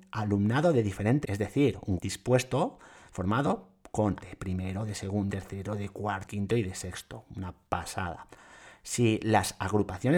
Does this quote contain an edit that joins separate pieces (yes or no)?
yes